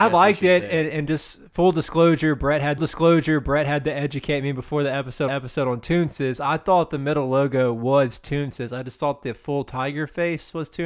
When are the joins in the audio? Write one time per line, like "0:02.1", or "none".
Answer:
0:02.8
0:05.3

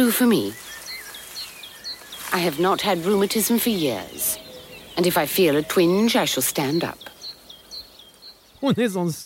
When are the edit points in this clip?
none

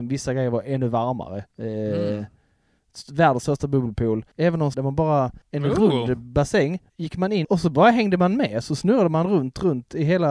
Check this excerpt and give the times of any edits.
0:01.5
0:04.3
0:04.7
0:05.4
0:06.9
0:07.4

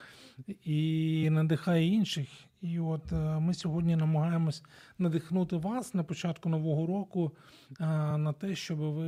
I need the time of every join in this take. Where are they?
none

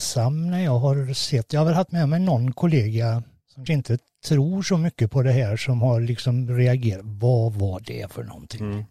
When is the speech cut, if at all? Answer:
0:03.7

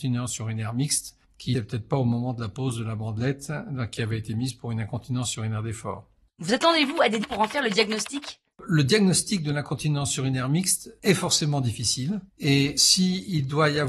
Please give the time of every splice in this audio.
0:01.5
0:06.2
0:07.2
0:08.5
0:12.3

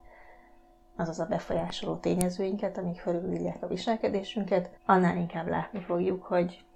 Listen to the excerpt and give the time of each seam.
0:04.8

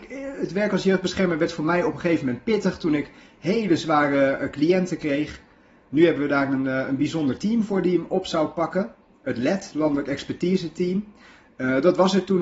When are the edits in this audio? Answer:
none

